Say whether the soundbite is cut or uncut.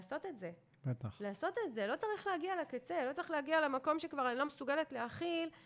uncut